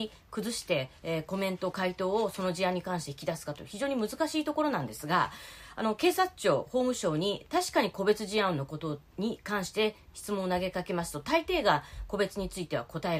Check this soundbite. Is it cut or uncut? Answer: cut